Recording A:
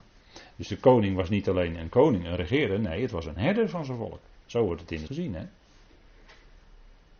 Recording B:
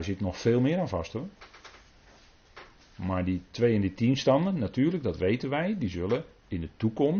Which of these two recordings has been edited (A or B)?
A